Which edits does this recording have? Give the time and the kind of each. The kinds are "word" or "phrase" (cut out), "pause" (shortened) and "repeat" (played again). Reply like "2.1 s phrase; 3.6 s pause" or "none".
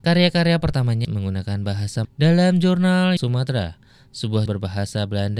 1.0 s word; 2.0 s word; 3.2 s word; 4.5 s word